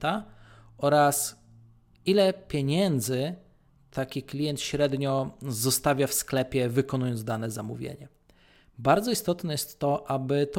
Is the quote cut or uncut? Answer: uncut